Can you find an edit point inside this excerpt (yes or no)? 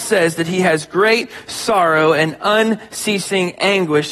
no